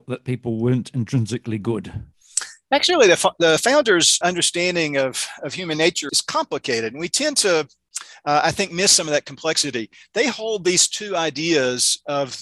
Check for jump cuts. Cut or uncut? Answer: cut